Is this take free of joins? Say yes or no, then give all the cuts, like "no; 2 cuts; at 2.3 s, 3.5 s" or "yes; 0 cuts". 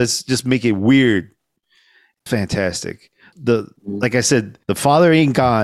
no; 3 cuts; at 2.3 s, 3.3 s, 4.6 s